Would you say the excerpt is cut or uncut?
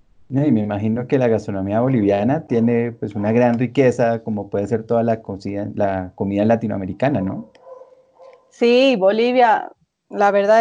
uncut